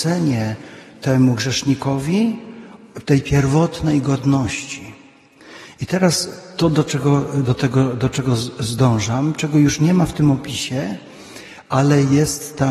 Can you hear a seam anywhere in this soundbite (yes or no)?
no